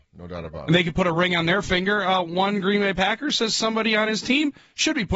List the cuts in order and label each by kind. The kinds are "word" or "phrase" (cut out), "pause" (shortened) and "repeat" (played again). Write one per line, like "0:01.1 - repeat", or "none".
none